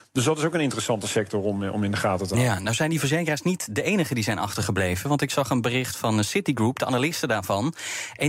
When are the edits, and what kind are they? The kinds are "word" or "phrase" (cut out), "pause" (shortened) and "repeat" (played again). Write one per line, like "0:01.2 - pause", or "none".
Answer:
none